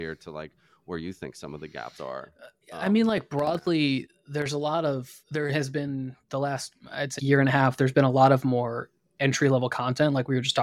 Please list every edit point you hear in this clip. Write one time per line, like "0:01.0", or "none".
0:05.2
0:07.2